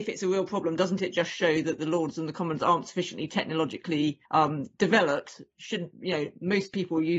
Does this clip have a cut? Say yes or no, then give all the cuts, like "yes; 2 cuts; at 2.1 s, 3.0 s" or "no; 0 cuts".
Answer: yes; 1 cut; at 4.3 s